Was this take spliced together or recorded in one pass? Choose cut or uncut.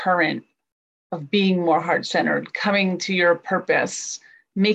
uncut